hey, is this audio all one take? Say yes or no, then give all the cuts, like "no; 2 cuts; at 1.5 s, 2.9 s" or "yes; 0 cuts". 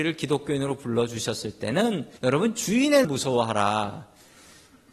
no; 2 cuts; at 2.2 s, 3.0 s